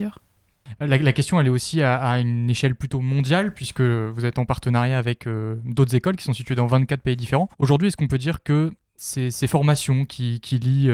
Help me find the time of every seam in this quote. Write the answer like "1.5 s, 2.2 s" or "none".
7.5 s